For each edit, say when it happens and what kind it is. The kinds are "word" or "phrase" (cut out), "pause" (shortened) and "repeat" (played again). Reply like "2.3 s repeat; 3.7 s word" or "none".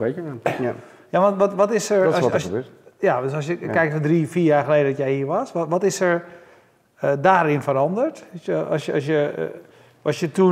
none